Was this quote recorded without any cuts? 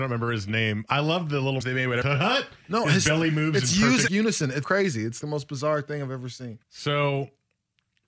no; 6 cuts; at 1.6 s, 2.0 s, 4.1 s, 4.6 s, 5.2 s, 6.6 s

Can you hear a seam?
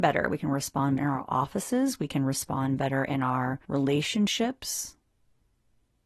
yes; 2 cuts; at 1.0 s, 3.6 s

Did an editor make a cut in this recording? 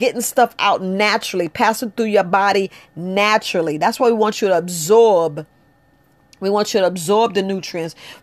no; 0 cuts

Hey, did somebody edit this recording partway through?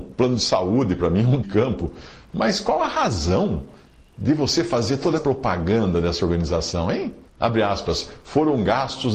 yes; 3 cuts; at 1.4 s, 5.2 s, 7.3 s

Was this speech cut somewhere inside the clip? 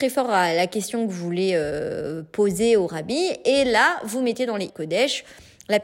yes; 1 cut; at 4.7 s

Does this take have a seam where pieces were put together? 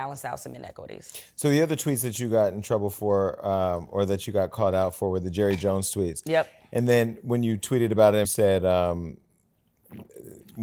yes; 1 cut; at 8.2 s

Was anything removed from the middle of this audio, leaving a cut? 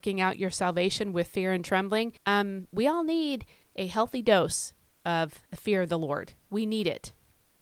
yes; 4 cuts; at 2.2 s, 3.6 s, 5.5 s, 6.4 s

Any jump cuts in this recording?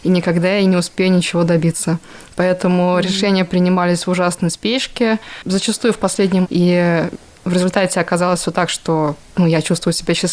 yes; 1 cut; at 6.4 s

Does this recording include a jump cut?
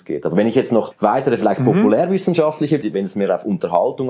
yes; 2 cuts; at 0.9 s, 2.8 s

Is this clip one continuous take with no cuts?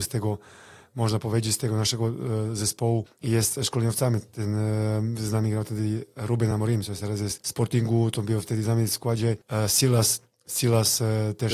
yes; 0 cuts

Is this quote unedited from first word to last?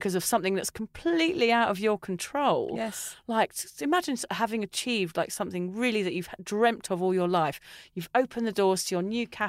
yes; 0 cuts

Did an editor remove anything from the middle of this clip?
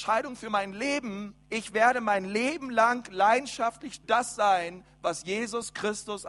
yes; 2 cuts; at 1.4 s, 4.0 s

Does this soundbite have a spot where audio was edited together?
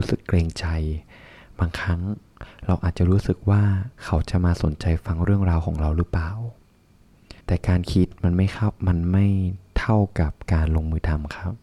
yes; 2 cuts; at 3.9 s, 7.4 s

